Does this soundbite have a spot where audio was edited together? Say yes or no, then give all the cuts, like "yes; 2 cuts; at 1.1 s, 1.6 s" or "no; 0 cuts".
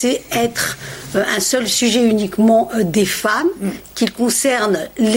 no; 0 cuts